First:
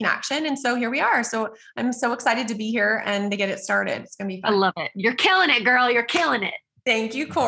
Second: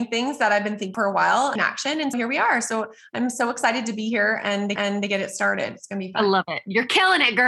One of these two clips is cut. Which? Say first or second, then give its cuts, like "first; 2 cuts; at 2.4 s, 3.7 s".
second; 4 cuts; at 0.9 s, 1.6 s, 2.1 s, 4.8 s